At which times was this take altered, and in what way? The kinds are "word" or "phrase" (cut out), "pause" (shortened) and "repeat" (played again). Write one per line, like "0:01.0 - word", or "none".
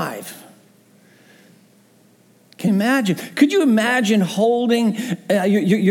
0:02.7 - word